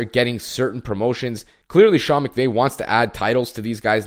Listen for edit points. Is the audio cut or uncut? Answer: uncut